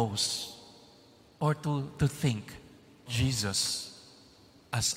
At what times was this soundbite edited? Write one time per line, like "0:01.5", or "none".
0:03.1

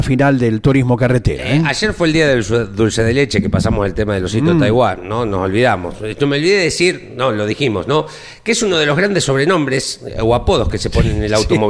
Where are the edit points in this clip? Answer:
none

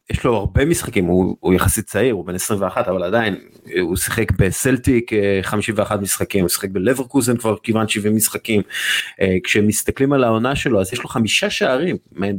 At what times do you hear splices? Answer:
none

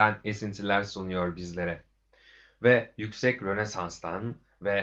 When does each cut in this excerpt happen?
none

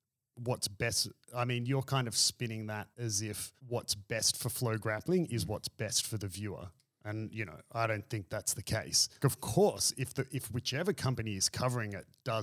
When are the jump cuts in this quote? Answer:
0:02.9
0:03.6
0:09.2

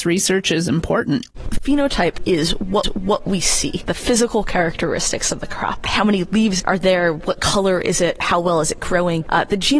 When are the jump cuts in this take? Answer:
0:02.8
0:06.6

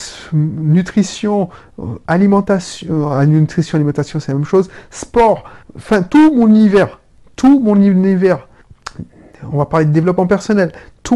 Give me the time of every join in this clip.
none

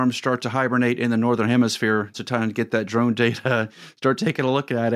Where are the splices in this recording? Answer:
0:02.1

